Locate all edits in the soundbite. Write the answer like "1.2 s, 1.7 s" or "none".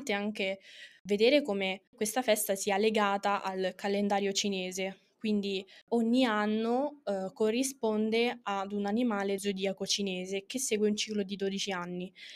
9.4 s